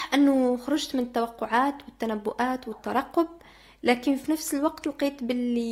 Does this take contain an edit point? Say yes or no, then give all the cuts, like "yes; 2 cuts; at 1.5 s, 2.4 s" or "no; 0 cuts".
no; 0 cuts